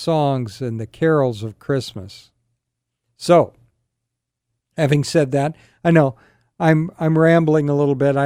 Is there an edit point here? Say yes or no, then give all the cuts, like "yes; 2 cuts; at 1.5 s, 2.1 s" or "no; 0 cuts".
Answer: no; 0 cuts